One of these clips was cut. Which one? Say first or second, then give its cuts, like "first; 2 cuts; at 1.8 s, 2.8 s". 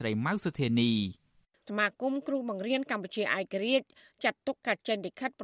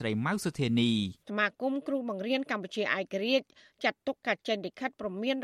second; 1 cut; at 1.2 s